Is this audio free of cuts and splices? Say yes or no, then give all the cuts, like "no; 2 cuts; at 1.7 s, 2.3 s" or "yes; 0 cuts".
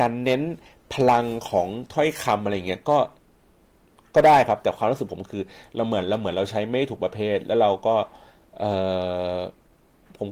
yes; 0 cuts